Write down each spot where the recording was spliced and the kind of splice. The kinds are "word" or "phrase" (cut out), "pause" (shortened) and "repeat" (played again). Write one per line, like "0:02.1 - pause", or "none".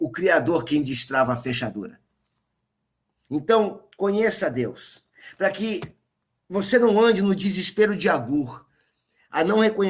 none